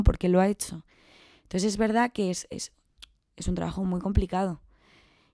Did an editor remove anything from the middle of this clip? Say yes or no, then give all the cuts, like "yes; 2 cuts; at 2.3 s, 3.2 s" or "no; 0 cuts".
no; 0 cuts